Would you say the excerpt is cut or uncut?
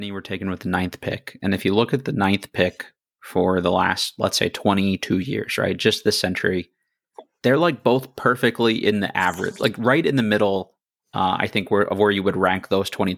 uncut